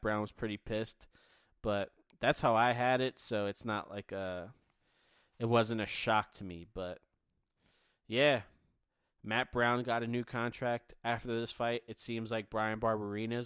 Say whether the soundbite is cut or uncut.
uncut